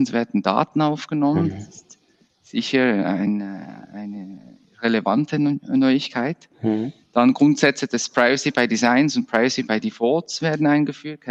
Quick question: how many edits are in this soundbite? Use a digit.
0